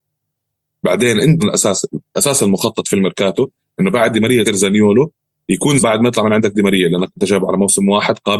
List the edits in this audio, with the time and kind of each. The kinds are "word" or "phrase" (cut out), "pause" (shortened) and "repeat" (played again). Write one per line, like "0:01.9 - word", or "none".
0:01.4 - word
0:04.4 - word
0:05.8 - word